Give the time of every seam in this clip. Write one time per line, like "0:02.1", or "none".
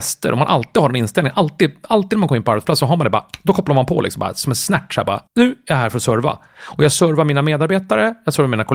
0:05.3